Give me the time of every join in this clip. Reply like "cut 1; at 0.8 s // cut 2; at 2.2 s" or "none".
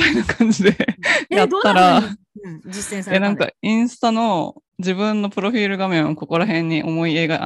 cut 1; at 4.7 s